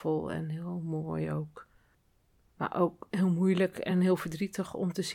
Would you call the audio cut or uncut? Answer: uncut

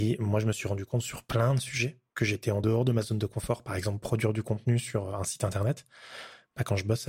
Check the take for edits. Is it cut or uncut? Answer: uncut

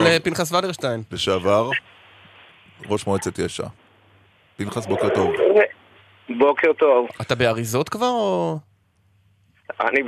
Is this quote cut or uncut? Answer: uncut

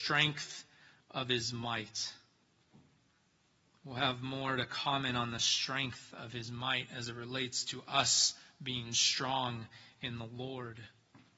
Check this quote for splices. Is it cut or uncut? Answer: uncut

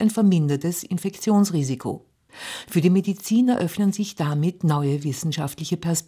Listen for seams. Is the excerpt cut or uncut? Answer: uncut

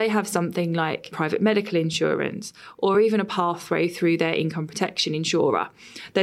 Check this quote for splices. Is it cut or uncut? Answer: uncut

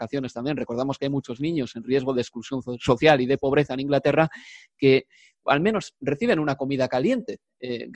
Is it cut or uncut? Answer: uncut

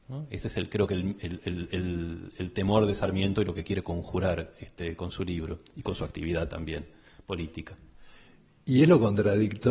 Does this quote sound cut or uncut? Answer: uncut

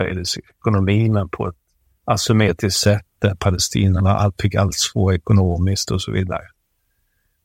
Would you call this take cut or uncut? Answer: uncut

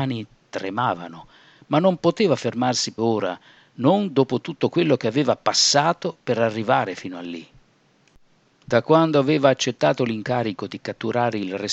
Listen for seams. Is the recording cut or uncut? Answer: cut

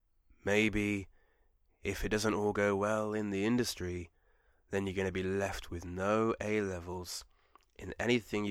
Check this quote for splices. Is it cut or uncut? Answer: uncut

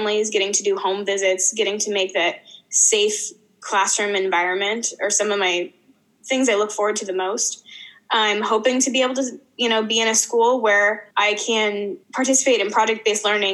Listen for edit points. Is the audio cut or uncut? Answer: cut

